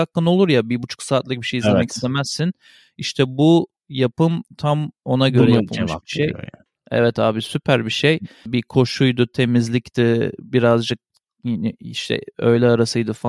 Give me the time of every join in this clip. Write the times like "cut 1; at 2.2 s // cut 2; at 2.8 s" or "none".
none